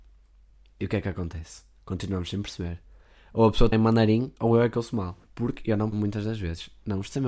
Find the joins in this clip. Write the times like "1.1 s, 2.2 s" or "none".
3.7 s, 5.2 s, 5.9 s